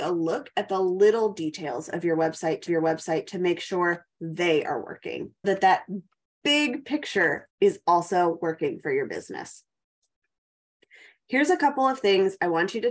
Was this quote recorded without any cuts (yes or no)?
no